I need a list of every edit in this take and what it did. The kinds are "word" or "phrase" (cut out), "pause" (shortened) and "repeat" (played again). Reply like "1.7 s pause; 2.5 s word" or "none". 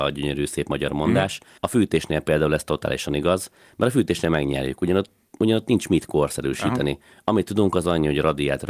1.6 s pause